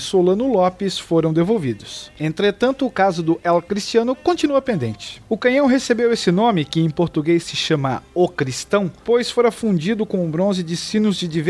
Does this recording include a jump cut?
no; 0 cuts

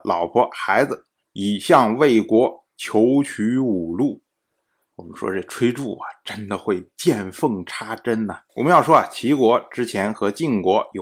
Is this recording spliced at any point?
yes; 2 cuts; at 1.2 s, 8.5 s

